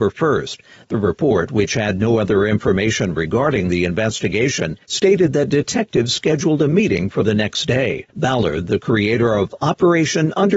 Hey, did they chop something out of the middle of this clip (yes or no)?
yes